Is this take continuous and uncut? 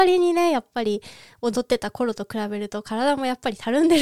yes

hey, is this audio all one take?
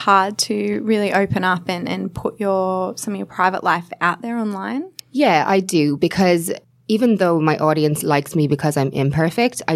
no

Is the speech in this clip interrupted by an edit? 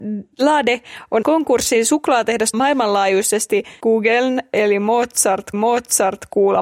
yes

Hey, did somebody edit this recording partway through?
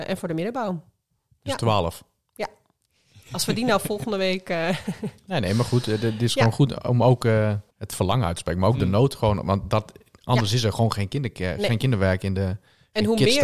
yes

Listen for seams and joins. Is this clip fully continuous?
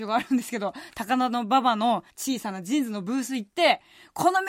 no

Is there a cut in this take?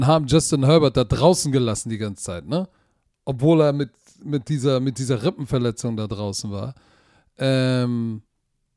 no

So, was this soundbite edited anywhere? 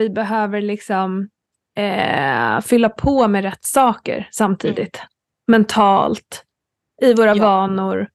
no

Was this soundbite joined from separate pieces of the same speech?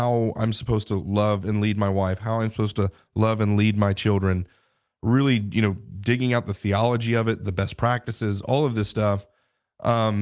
no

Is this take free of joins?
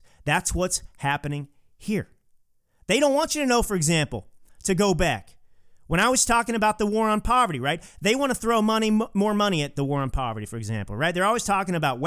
yes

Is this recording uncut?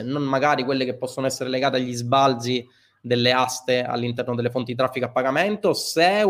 yes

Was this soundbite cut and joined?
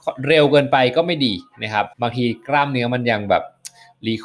yes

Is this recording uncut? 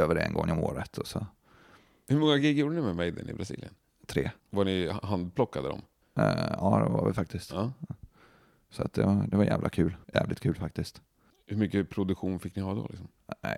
no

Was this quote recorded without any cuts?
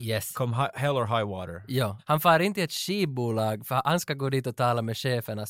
yes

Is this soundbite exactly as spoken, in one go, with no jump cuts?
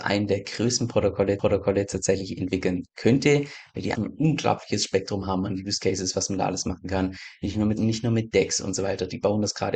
no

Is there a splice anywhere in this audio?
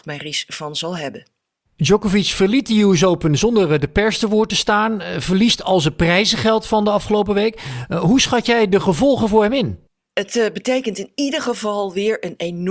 no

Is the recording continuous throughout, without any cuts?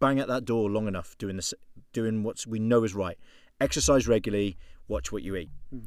yes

